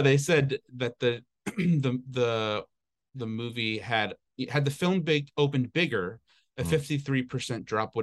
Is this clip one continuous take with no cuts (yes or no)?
yes